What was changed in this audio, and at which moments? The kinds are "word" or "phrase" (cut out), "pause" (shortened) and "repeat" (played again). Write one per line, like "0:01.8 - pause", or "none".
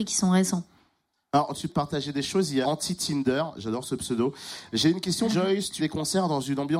0:01.7 - word
0:02.6 - word
0:05.3 - word
0:05.8 - word